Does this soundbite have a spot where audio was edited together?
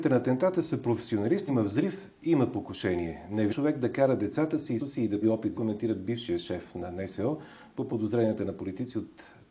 yes; 6 cuts; at 1.5 s, 3.5 s, 4.8 s, 5.2 s, 5.6 s, 7.9 s

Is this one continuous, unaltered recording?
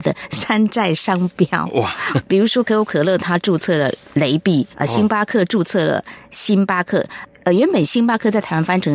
no; 1 cut; at 4.7 s

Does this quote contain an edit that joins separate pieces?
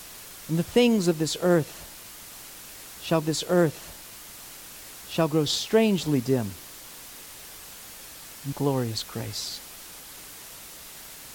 yes; 2 cuts; at 3.2 s, 8.5 s

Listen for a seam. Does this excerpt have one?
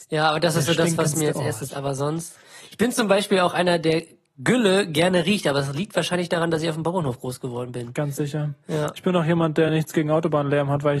no; 0 cuts

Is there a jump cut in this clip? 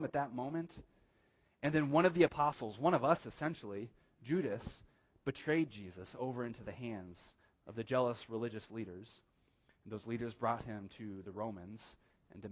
no; 0 cuts

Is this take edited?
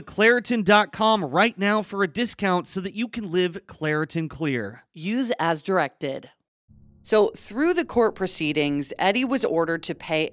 yes; 1 cut; at 6.5 s

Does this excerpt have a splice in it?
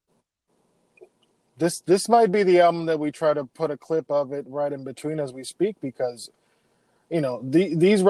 no; 0 cuts

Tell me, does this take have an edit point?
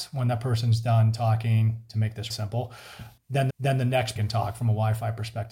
yes; 3 cuts; at 2.3 s, 3.5 s, 4.2 s

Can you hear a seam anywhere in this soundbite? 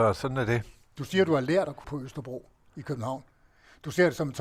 yes; 1 cut; at 1.8 s

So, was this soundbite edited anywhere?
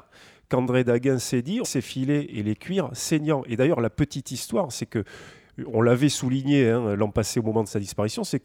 yes; 1 cut; at 1.6 s

